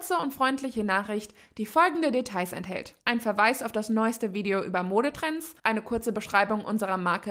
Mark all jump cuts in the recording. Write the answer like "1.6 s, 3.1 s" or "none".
3.0 s, 5.6 s